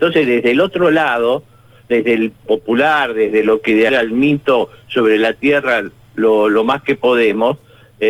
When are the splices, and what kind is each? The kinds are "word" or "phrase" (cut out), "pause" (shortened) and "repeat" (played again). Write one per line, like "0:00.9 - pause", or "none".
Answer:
0:02.5 - phrase
0:03.9 - phrase